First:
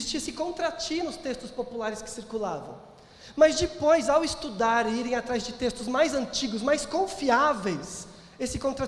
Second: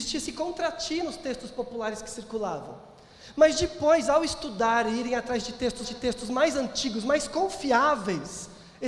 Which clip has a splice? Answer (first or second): second